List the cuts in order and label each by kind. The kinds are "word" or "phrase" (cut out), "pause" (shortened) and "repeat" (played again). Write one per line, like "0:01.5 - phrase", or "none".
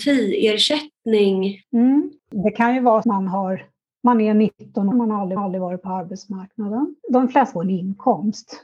0:02.2 - pause
0:03.0 - phrase
0:04.9 - word
0:05.4 - repeat
0:07.0 - pause
0:07.6 - phrase